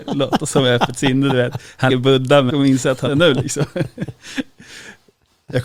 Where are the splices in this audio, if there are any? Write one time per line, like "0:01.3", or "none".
0:01.9
0:02.5
0:03.1